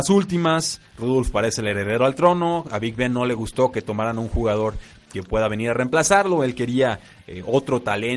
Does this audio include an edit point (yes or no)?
no